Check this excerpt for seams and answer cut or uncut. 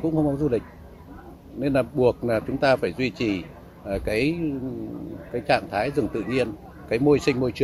uncut